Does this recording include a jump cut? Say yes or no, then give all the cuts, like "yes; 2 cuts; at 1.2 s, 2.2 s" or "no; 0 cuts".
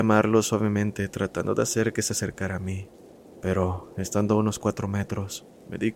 no; 0 cuts